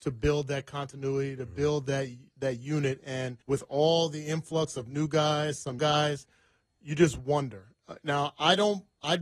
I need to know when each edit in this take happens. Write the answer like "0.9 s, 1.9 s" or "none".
3.4 s, 5.8 s